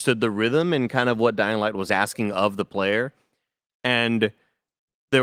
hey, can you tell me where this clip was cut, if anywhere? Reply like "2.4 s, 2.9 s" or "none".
none